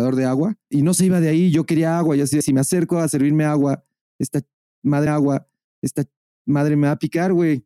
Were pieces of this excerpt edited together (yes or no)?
yes